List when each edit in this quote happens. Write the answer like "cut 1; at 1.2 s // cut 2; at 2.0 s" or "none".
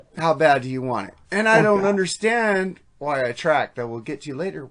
cut 1; at 1.2 s // cut 2; at 2.9 s